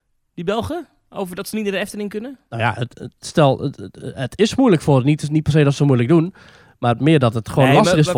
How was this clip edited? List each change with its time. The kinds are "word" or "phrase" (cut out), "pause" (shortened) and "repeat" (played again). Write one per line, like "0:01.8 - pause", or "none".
none